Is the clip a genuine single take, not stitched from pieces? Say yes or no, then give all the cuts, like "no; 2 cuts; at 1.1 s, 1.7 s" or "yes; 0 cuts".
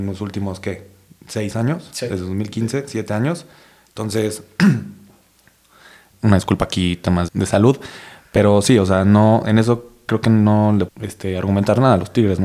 no; 3 cuts; at 6.1 s, 7.3 s, 10.9 s